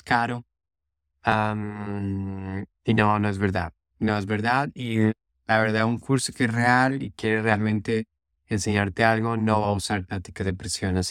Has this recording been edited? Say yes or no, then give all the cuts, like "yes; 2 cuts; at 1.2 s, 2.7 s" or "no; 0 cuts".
no; 0 cuts